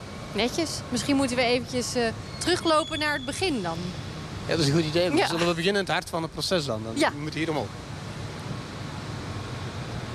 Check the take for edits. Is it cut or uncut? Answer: uncut